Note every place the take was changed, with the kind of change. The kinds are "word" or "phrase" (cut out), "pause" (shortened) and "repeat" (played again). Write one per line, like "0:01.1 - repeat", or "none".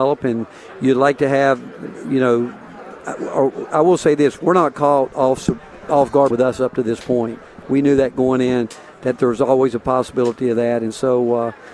0:06.3 - phrase